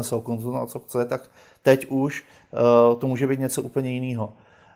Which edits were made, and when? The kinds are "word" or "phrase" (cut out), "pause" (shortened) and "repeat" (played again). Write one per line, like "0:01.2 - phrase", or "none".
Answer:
none